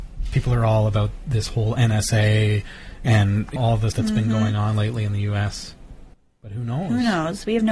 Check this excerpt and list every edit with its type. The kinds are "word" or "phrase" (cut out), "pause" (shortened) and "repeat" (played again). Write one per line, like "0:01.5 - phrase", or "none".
0:03.6 - word
0:03.9 - word
0:06.1 - pause